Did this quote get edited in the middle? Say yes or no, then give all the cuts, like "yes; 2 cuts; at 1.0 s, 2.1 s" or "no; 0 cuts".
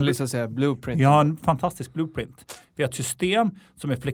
no; 0 cuts